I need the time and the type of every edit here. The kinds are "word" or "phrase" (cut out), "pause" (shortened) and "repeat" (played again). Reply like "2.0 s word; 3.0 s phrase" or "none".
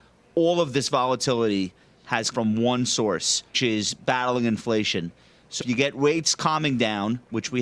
2.3 s word; 3.5 s word; 5.6 s word